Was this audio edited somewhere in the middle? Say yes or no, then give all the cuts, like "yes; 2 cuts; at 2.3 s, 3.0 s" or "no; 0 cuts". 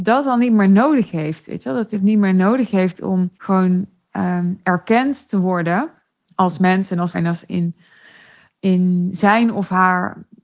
yes; 5 cuts; at 1.9 s, 3.3 s, 6.1 s, 7.1 s, 7.5 s